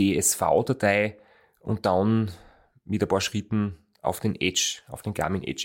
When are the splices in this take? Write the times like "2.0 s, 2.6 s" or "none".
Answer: none